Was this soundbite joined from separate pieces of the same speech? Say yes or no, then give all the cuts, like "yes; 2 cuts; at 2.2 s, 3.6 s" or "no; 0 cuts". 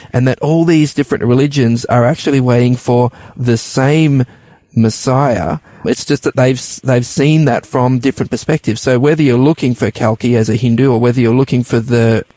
no; 0 cuts